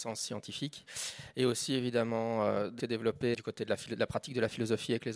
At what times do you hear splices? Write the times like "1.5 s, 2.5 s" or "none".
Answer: 2.8 s, 3.3 s